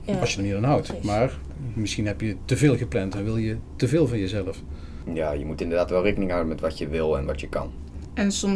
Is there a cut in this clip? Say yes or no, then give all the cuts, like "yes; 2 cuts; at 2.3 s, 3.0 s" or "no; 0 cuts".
no; 0 cuts